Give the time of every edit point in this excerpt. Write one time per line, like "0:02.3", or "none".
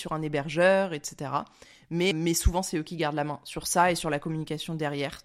0:02.1